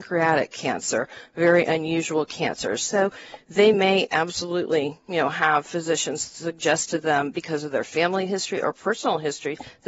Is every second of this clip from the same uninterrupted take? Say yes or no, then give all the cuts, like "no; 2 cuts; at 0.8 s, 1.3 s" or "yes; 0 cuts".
yes; 0 cuts